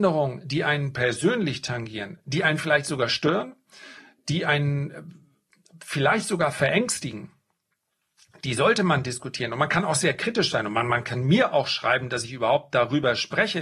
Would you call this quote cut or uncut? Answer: uncut